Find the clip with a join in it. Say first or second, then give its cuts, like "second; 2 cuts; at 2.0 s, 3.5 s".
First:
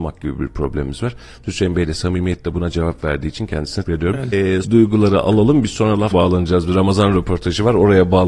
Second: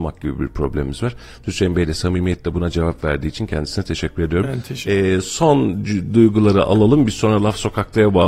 first; 4 cuts; at 3.8 s, 4.3 s, 4.6 s, 6.1 s